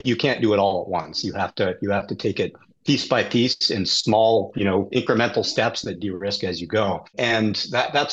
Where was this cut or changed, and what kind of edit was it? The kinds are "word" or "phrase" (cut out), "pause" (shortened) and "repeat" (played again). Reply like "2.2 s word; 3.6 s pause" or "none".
none